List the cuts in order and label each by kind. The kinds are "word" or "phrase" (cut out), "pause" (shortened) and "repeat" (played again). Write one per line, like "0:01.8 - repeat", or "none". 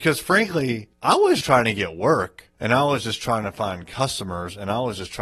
0:00.9 - pause
0:01.4 - word
0:02.5 - pause

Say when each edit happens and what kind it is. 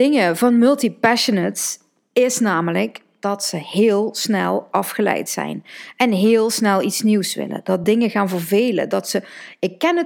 none

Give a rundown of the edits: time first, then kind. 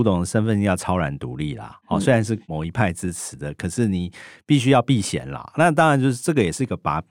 none

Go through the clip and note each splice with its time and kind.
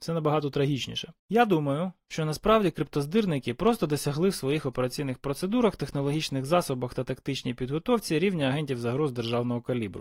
0:01.2 - pause

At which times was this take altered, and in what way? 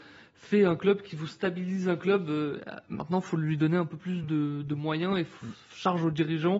none

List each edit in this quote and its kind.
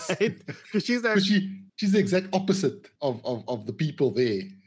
0:01.7 - pause
0:03.0 - pause

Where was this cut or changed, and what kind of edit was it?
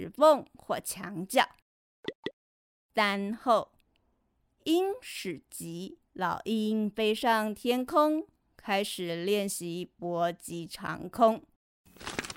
0:06.1 - pause

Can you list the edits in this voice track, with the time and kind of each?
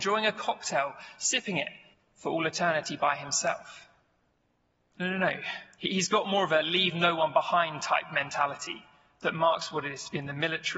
0:01.9 - pause
0:04.3 - pause
0:05.7 - pause

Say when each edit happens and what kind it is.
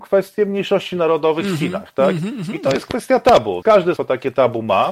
0:03.6 - word
0:04.0 - word

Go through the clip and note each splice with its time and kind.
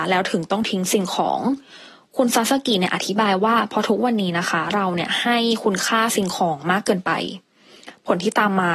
none

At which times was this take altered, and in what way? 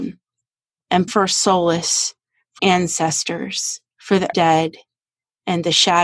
0:01.1 - word
0:02.6 - word
0:03.9 - pause
0:04.3 - word

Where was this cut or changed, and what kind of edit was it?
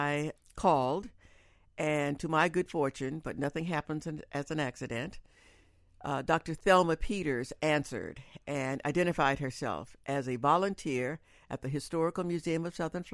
none

